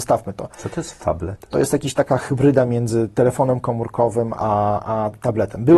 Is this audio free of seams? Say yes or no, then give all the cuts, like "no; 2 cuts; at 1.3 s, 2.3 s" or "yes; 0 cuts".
yes; 0 cuts